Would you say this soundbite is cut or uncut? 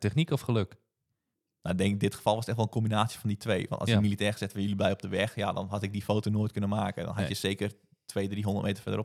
uncut